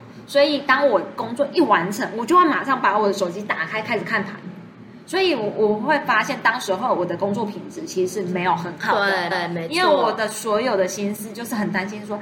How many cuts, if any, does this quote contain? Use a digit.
1